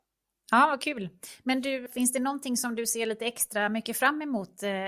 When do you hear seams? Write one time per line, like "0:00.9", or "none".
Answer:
0:01.9